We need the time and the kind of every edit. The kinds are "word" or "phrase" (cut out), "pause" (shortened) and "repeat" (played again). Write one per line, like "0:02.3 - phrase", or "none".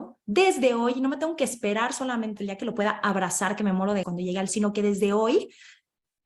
0:02.4 - word
0:04.0 - word
0:04.5 - word